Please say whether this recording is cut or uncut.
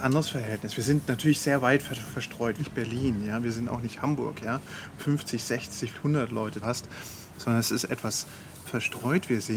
cut